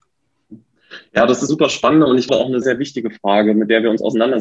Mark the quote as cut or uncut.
cut